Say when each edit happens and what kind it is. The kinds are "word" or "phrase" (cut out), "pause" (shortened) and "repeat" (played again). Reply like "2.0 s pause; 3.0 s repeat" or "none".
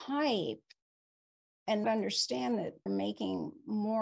1.8 s word; 2.9 s word